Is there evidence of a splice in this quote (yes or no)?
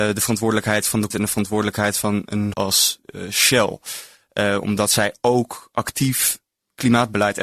yes